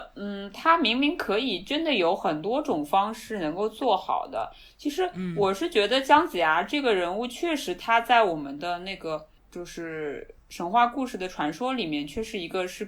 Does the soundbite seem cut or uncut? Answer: cut